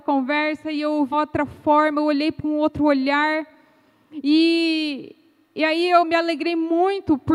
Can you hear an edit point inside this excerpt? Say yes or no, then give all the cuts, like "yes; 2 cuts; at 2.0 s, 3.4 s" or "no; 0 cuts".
yes; 3 cuts; at 1.1 s, 2.4 s, 6.0 s